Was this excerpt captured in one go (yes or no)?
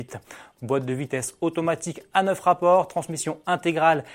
yes